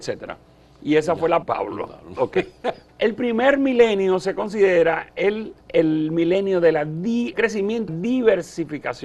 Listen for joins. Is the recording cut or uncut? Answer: cut